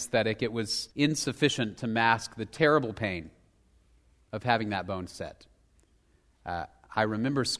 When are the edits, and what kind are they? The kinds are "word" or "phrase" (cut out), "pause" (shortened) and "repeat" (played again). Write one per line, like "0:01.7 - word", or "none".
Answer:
0:00.9 - pause